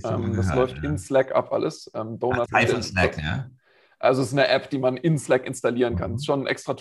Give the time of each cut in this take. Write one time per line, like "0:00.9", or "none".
0:02.5